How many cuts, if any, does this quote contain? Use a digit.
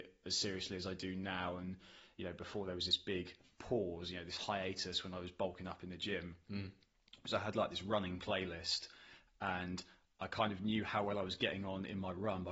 0